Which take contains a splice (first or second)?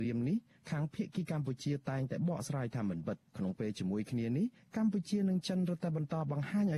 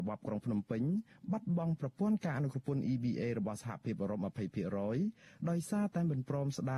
first